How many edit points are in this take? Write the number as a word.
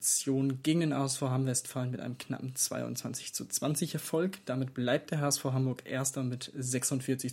zero